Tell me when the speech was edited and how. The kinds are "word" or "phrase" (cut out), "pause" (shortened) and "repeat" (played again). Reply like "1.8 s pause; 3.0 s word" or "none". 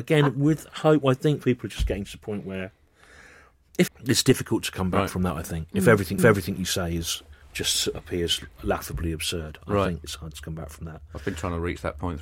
1.4 s word; 3.9 s phrase; 6.2 s repeat; 7.3 s pause; 10.0 s word